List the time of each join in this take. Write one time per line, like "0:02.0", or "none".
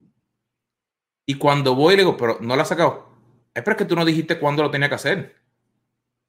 none